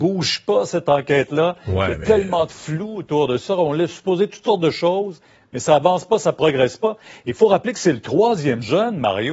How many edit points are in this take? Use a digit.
0